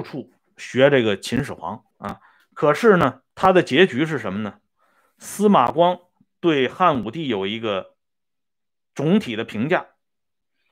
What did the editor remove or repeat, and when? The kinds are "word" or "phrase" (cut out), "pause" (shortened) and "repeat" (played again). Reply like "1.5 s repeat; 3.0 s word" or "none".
1.9 s pause; 3.3 s pause